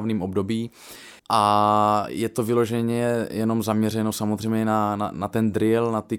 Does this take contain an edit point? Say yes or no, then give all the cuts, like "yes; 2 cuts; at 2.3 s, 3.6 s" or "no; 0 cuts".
yes; 1 cut; at 1.2 s